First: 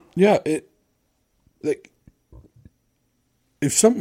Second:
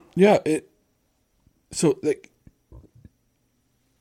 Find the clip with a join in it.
first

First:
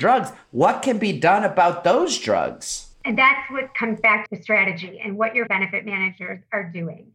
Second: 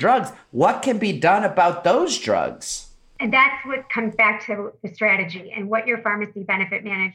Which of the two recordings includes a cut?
first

